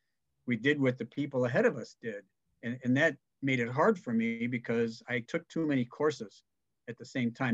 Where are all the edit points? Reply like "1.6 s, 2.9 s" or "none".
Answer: 2.5 s